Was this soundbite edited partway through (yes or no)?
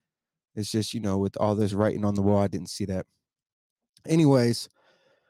no